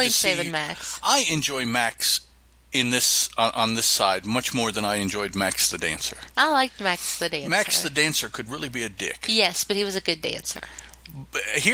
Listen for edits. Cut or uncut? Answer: uncut